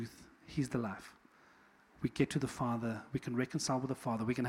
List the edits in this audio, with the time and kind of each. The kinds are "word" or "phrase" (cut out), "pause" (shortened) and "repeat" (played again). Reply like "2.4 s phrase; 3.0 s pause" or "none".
none